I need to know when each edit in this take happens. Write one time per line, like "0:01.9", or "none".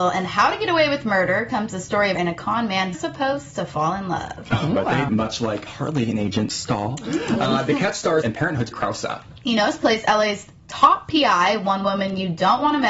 0:02.2
0:02.9
0:05.1
0:05.7
0:08.2
0:08.7
0:09.4